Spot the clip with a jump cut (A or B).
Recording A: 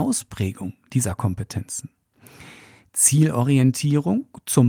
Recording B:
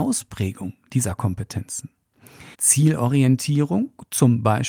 B